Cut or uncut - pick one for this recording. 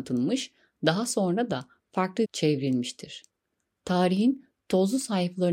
cut